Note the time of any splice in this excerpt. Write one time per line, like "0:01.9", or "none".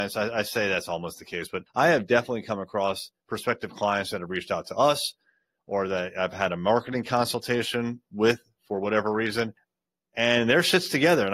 0:03.2